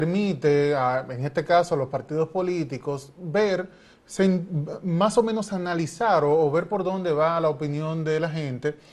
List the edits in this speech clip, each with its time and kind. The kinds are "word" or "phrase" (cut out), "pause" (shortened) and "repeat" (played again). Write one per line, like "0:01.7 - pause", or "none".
none